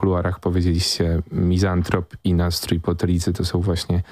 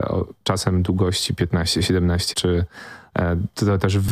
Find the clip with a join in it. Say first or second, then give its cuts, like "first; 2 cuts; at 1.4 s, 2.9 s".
second; 1 cut; at 2.3 s